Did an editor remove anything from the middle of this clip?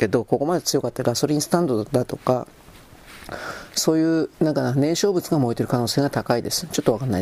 yes; 1 cut; at 4.3 s

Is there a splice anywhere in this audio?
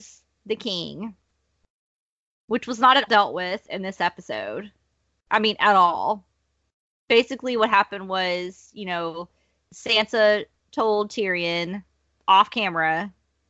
yes; 1 cut; at 3.1 s

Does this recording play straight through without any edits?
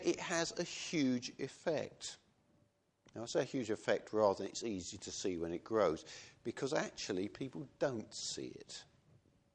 yes; 0 cuts

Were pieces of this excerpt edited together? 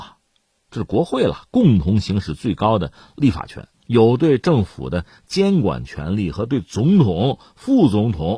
yes; 1 cut; at 3.7 s

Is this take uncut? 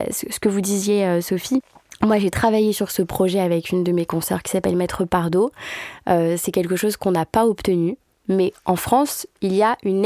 yes; 0 cuts

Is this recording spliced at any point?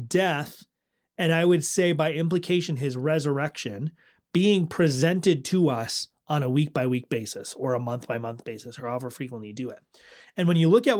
no; 0 cuts

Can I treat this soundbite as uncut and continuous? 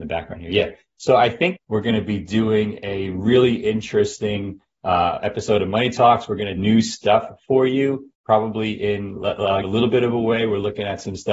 no; 4 cuts; at 1.6 s, 6.6 s, 8.1 s, 9.6 s

